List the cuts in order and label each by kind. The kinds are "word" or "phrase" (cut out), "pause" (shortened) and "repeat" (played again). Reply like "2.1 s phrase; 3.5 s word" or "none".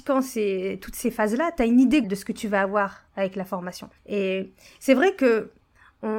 2.0 s word; 3.1 s pause; 4.0 s pause